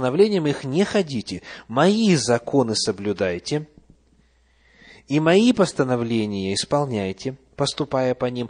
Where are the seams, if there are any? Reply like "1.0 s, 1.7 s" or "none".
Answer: none